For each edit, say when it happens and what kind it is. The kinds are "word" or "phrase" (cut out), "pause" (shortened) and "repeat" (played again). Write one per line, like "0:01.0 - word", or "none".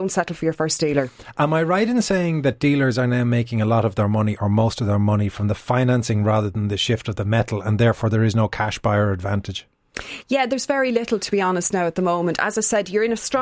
none